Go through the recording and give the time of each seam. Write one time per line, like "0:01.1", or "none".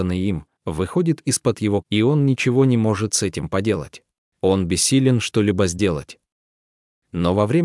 0:01.8
0:04.2